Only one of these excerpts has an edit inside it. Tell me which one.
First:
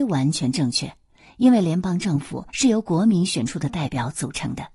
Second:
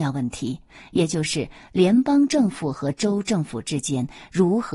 first; 1 cut; at 2.5 s

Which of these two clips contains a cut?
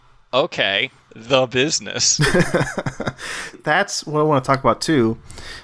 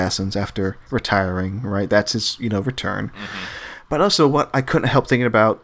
first; 2 cuts; at 1.1 s, 3.5 s

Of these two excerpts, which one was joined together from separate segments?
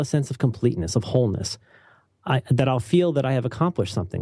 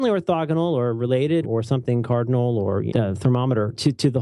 second; 2 cuts; at 1.4 s, 2.9 s

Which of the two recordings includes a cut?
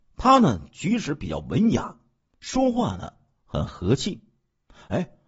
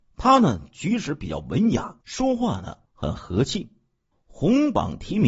second; 3 cuts; at 2.0 s, 2.8 s, 4.1 s

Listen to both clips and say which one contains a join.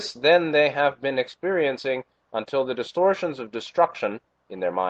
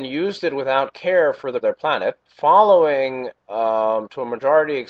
second; 2 cuts; at 1.6 s, 2.3 s

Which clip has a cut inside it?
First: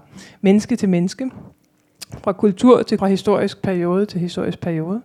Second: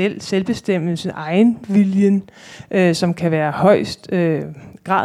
first; 1 cut; at 3.0 s

